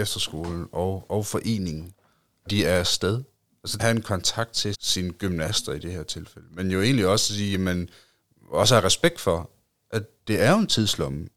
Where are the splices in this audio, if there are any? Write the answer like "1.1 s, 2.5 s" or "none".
1.1 s, 2.5 s, 3.8 s, 4.7 s